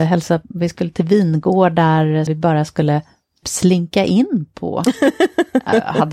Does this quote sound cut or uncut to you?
cut